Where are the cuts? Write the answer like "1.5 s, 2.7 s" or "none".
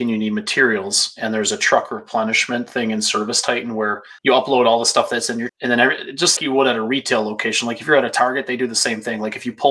4.2 s, 5.5 s, 6.4 s